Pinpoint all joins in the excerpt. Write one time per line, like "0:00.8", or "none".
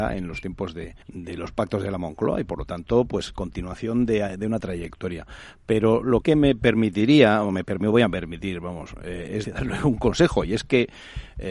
0:01.0
0:06.2
0:09.4

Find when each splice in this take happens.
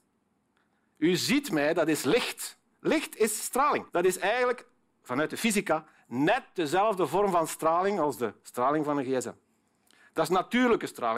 0:03.9

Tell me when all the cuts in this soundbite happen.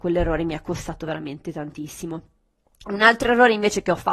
none

